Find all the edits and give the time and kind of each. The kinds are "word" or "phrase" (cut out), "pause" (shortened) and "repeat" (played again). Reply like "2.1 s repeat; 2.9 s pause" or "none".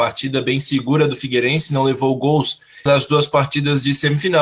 2.9 s word